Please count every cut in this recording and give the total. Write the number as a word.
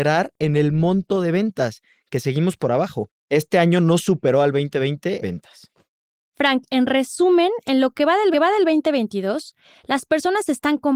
three